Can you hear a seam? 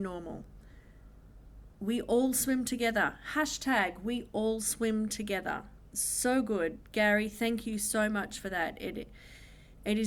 no; 0 cuts

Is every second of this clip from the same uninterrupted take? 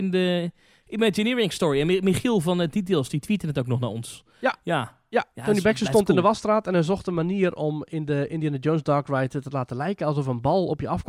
yes; 0 cuts

